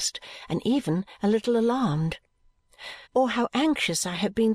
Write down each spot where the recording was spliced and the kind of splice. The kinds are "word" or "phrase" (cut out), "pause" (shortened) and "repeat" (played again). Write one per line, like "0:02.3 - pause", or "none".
0:03.0 - pause

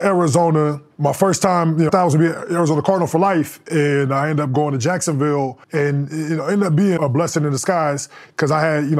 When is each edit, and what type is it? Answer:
0:01.9 - word
0:05.6 - pause
0:07.0 - word

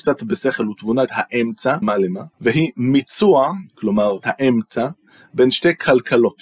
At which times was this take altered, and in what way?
0:01.1 - phrase
0:01.8 - word
0:02.3 - pause
0:04.2 - word

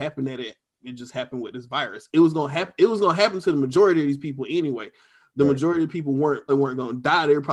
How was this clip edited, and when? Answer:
0:06.5 - word

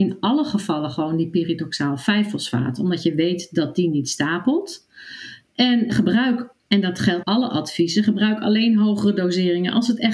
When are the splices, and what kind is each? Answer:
0:05.9 - word
0:07.2 - phrase

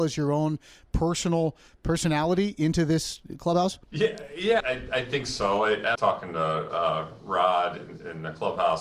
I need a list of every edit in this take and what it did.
0:03.8 - pause
0:04.6 - word
0:06.0 - phrase

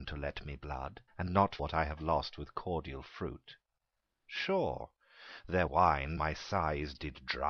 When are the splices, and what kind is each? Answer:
0:01.1 - pause
0:01.6 - word
0:05.7 - word
0:06.2 - word

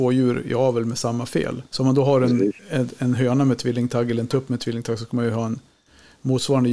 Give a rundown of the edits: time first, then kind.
0:01.7 - pause

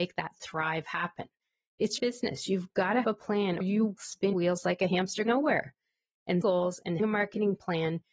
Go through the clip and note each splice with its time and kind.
0:02.0 - word
0:03.0 - word
0:03.6 - word
0:04.0 - word
0:04.3 - word
0:05.3 - word
0:06.4 - word
0:07.0 - word

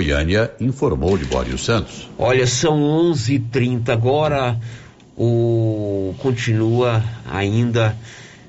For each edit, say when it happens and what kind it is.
0:06.1 - phrase

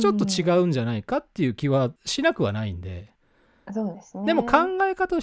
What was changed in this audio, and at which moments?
0:02.0 - pause
0:03.2 - pause

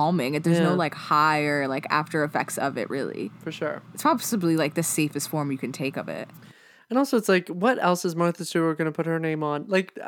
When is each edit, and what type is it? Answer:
none

